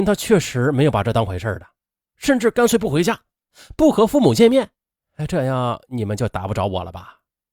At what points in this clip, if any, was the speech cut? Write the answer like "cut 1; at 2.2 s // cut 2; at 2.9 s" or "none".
none